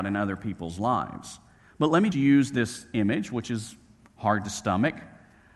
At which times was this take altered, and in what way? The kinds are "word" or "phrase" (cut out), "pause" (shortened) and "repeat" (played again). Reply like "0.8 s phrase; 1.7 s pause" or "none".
2.1 s word